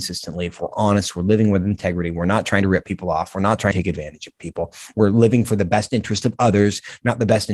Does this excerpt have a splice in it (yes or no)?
yes